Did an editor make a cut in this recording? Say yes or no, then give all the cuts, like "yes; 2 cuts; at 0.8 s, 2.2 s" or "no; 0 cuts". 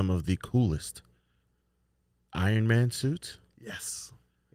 no; 0 cuts